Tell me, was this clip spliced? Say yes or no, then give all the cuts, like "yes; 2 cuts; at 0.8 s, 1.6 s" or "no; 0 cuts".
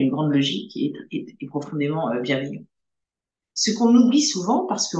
no; 0 cuts